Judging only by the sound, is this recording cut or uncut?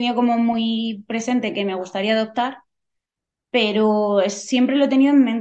uncut